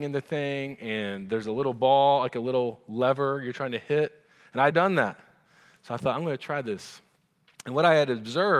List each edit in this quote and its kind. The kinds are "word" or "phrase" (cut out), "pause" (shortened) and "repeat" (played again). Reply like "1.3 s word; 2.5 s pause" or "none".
4.7 s word